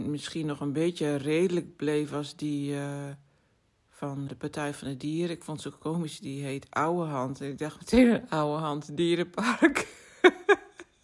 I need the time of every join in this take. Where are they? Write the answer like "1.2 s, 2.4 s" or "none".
4.3 s